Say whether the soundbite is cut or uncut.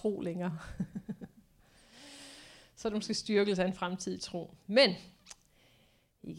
uncut